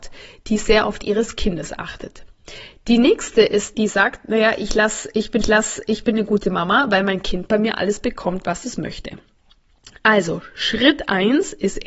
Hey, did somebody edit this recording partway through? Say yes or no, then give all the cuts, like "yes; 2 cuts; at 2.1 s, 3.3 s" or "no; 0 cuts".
yes; 3 cuts; at 1.0 s, 3.7 s, 5.4 s